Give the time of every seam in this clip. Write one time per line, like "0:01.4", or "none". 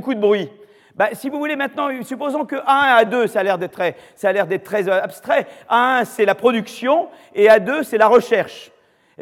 0:03.7